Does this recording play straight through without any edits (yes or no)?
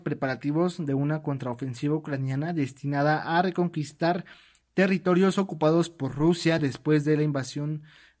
yes